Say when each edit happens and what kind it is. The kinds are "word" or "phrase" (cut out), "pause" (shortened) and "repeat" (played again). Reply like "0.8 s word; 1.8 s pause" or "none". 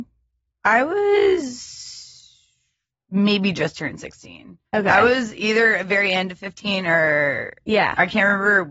4.7 s pause